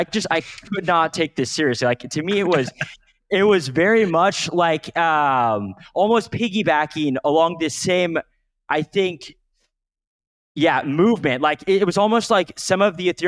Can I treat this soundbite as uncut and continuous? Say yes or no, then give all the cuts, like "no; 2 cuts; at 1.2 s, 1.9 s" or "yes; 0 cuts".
yes; 0 cuts